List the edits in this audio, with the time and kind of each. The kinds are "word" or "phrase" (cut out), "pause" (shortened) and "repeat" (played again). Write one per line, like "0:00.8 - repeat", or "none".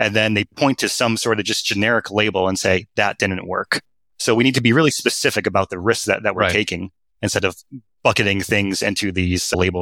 none